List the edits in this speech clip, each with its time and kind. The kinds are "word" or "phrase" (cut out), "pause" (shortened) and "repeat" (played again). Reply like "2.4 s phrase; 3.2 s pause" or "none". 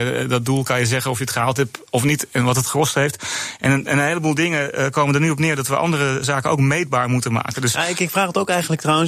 none